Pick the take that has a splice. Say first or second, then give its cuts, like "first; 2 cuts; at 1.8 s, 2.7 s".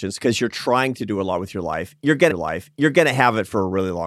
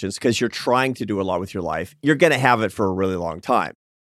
first; 1 cut; at 2.3 s